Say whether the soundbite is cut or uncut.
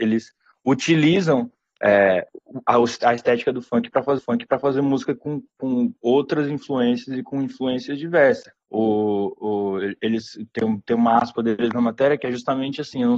cut